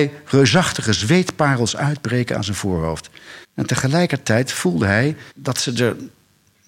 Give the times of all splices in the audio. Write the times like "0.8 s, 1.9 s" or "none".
3.4 s, 5.3 s